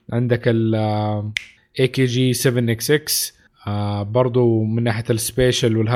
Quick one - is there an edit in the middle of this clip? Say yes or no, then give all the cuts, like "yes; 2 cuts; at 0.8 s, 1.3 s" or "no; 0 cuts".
no; 0 cuts